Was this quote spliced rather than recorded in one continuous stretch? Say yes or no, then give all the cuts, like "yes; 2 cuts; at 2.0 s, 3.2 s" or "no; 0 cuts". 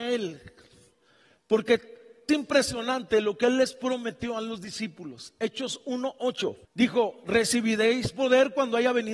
yes; 2 cuts; at 2.3 s, 6.6 s